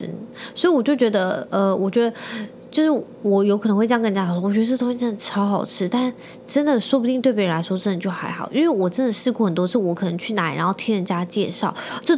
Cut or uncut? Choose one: uncut